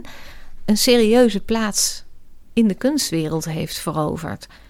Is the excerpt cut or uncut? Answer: uncut